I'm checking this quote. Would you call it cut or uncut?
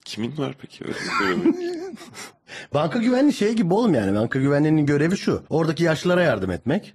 cut